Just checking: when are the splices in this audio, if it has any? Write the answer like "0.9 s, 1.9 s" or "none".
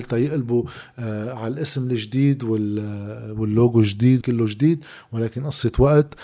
4.2 s